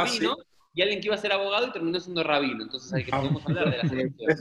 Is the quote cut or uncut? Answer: uncut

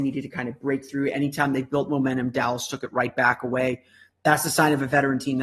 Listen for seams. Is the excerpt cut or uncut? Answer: uncut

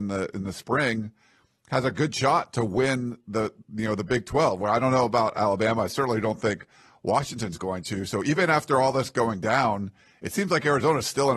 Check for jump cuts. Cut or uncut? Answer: uncut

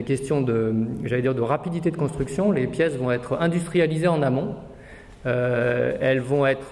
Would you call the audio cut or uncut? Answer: uncut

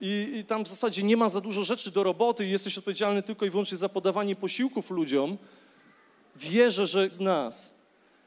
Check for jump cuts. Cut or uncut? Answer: cut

